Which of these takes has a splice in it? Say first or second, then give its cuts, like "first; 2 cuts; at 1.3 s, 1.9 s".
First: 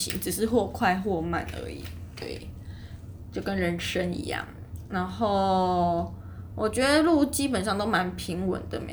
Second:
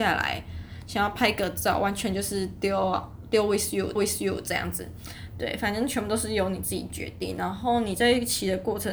second; 1 cut; at 4.0 s